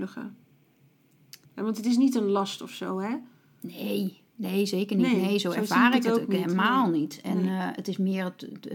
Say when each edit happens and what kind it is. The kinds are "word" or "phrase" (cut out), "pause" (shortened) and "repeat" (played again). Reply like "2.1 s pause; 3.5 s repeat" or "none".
1.4 s pause; 4.3 s pause